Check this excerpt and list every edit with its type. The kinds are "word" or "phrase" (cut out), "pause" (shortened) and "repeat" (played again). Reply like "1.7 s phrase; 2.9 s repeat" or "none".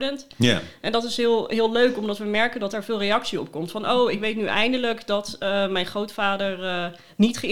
none